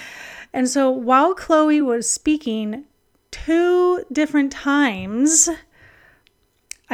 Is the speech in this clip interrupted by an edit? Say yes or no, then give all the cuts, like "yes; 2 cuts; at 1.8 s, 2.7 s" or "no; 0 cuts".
no; 0 cuts